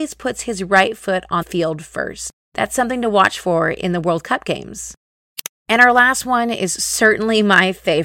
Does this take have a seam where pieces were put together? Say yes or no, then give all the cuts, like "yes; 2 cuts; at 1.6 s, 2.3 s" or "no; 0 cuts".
yes; 2 cuts; at 1.4 s, 5.6 s